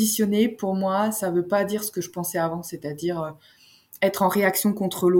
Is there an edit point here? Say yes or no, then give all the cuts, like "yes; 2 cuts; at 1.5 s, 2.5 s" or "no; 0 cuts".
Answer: no; 0 cuts